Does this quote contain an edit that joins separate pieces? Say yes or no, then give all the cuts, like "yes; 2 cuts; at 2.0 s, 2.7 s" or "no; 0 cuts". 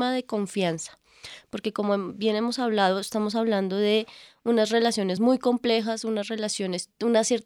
no; 0 cuts